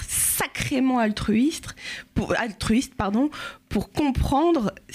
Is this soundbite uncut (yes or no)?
yes